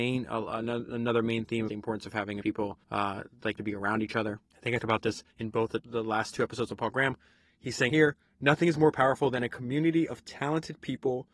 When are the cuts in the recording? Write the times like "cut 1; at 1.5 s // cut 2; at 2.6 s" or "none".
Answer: cut 1; at 1.7 s // cut 2; at 2.4 s // cut 3; at 2.8 s // cut 4; at 3.6 s // cut 5; at 4.4 s // cut 6; at 4.8 s // cut 7; at 5.3 s // cut 8; at 5.8 s // cut 9; at 7.9 s